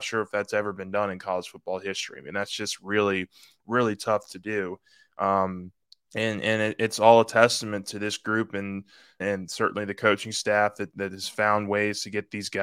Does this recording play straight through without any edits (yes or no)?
no